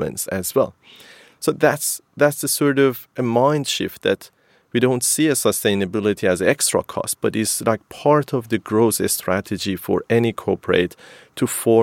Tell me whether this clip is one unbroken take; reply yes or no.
yes